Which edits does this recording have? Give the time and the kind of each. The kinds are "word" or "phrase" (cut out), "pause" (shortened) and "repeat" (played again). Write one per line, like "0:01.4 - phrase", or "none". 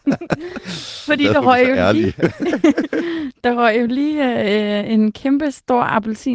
none